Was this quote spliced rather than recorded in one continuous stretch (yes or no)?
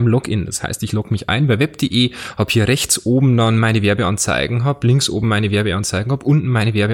no